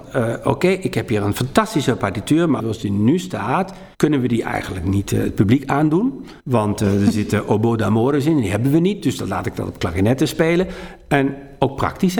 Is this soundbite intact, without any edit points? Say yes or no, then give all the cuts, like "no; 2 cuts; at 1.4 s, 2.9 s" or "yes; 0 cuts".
no; 3 cuts; at 2.6 s, 3.9 s, 6.4 s